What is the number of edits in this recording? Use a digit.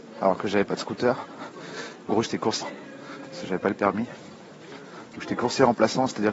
2